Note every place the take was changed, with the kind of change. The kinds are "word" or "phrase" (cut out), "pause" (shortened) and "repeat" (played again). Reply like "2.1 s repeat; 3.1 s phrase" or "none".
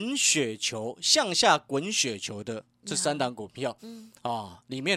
3.8 s word

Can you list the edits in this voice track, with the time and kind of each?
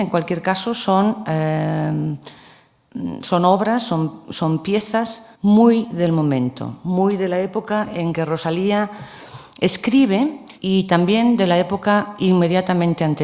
5.3 s pause; 10.6 s pause

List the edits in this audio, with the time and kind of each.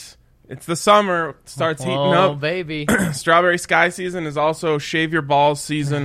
none

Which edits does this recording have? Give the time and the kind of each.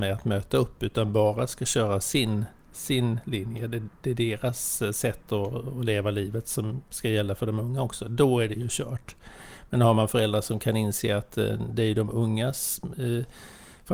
none

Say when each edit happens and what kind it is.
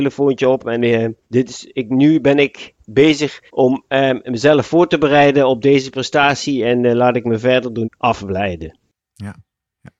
1.2 s pause; 3.5 s pause; 7.8 s word

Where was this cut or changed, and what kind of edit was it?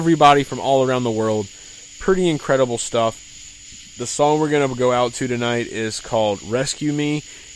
none

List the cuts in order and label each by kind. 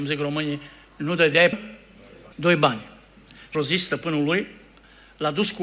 1.5 s phrase; 2.3 s pause; 3.5 s word

